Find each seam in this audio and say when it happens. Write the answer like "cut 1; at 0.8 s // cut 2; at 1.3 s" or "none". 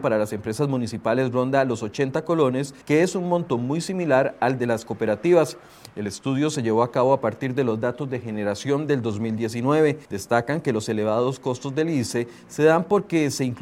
cut 1; at 2.8 s // cut 2; at 10.0 s